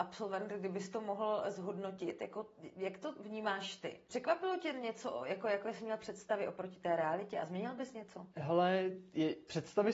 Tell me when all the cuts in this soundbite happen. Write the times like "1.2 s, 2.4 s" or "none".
4.0 s, 8.3 s